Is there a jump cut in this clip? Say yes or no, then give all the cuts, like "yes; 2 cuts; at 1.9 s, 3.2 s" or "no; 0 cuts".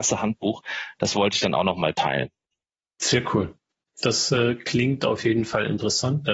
no; 0 cuts